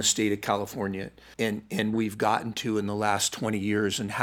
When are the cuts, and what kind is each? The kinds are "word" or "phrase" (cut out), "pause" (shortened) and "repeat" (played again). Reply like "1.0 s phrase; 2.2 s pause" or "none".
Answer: 1.3 s word; 1.9 s word